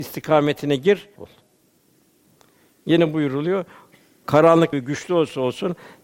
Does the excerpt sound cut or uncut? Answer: cut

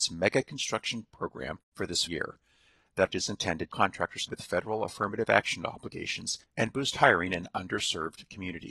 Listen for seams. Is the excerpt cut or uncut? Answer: cut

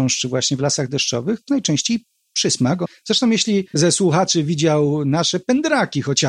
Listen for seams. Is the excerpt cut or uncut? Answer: cut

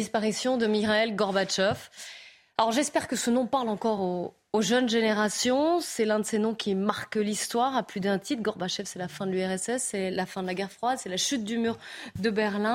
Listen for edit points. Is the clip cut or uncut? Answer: uncut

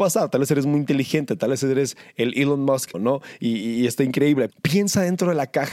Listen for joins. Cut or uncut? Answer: cut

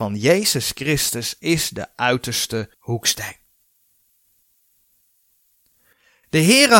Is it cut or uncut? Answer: cut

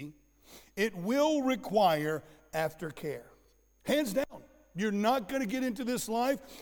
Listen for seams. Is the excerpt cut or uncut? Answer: uncut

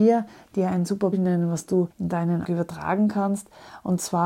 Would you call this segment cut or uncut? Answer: cut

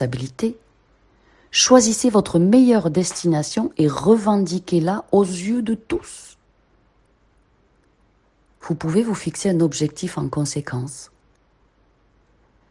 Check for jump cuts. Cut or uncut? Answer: uncut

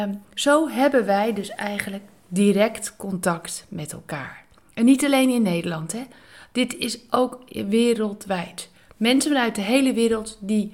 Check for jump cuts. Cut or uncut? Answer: uncut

